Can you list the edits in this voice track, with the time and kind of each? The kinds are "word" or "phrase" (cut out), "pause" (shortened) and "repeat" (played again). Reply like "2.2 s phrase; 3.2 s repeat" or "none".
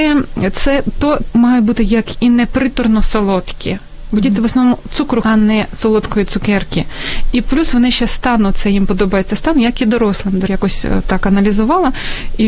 1.3 s word; 2.1 s word; 5.2 s word; 10.5 s word